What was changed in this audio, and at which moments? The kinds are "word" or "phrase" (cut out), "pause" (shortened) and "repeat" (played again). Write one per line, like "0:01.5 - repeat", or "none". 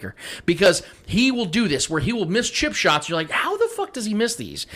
none